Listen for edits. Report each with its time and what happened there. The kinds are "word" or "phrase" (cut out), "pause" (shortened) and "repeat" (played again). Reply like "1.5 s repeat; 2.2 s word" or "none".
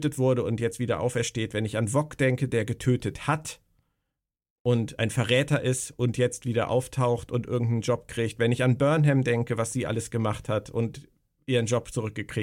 none